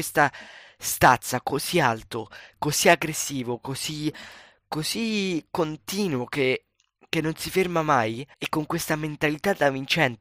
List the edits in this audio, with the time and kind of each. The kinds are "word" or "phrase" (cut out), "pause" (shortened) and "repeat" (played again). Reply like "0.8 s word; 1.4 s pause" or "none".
8.3 s pause